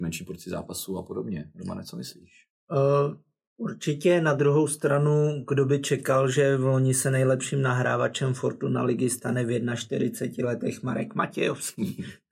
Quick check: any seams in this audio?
no; 0 cuts

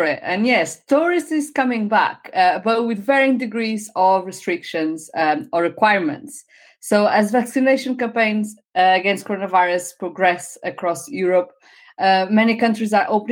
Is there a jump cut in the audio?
no; 0 cuts

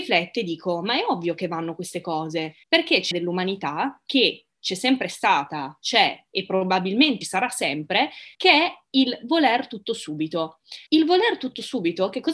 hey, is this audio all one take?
no; 5 cuts; at 2.6 s, 3.1 s, 7.2 s, 8.3 s, 10.9 s

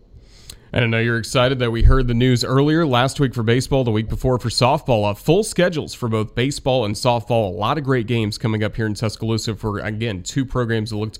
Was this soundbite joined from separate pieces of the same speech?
no; 0 cuts

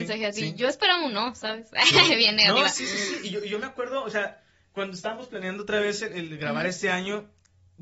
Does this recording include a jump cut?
no; 0 cuts

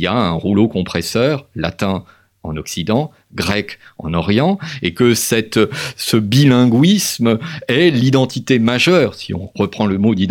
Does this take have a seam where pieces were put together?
no; 0 cuts

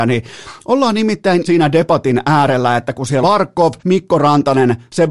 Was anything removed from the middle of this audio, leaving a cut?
yes; 3 cuts; at 1.5 s, 3.2 s, 3.8 s

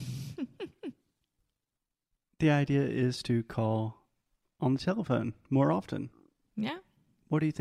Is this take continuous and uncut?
yes; 0 cuts

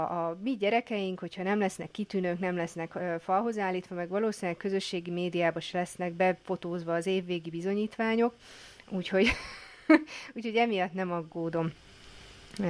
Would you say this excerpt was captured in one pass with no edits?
yes; 0 cuts

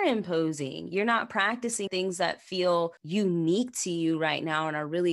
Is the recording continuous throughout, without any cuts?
no; 2 cuts; at 1.9 s, 3.0 s

